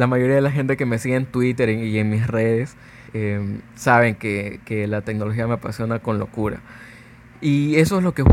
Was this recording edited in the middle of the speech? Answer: yes; 1 cut; at 3.1 s

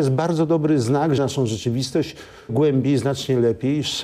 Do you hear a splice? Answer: yes; 2 cuts; at 1.2 s, 2.5 s

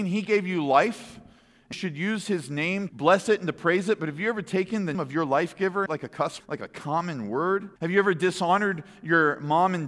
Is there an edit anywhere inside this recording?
yes; 6 cuts; at 1.7 s, 2.9 s, 4.9 s, 5.9 s, 6.4 s, 7.8 s

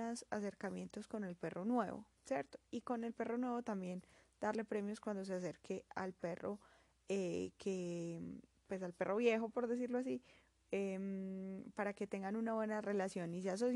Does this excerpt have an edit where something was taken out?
no; 0 cuts

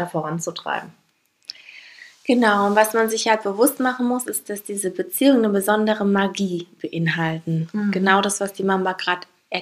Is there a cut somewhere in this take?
no; 0 cuts

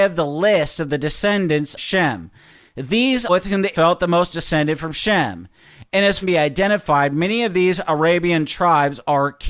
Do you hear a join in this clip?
yes; 5 cuts; at 1.8 s, 3.3 s, 3.7 s, 4.3 s, 6.2 s

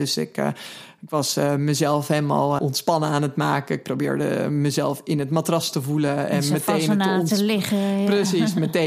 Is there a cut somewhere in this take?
yes; 1 cut; at 2.6 s

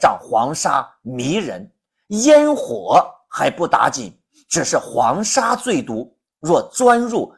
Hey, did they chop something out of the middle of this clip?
no; 0 cuts

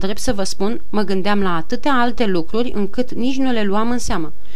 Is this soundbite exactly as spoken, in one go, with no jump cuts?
yes; 0 cuts

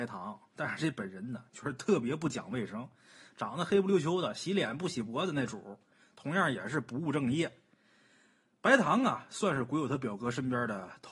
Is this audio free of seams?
yes; 0 cuts

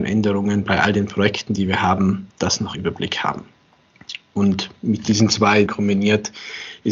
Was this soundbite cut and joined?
yes; 3 cuts; at 2.3 s, 2.7 s, 5.7 s

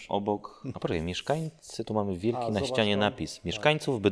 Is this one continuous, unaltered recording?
yes; 0 cuts

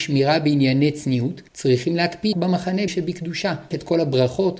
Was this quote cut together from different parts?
yes; 4 cuts; at 1.5 s, 2.3 s, 2.9 s, 3.7 s

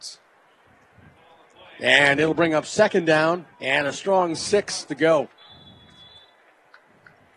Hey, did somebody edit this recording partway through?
yes; 2 cuts; at 3.5 s, 4.9 s

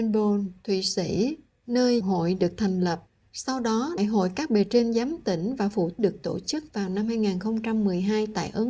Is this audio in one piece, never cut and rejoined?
no; 4 cuts; at 2.0 s, 3.2 s, 4.0 s, 6.0 s

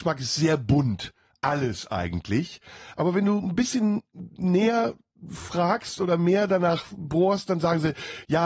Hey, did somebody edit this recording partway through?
no; 0 cuts

